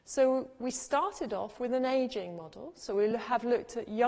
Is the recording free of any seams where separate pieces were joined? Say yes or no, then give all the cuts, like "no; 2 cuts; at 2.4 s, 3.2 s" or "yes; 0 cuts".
yes; 0 cuts